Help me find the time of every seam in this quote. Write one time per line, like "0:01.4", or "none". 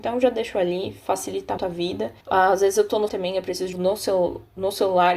0:01.6
0:02.2
0:03.1
0:03.7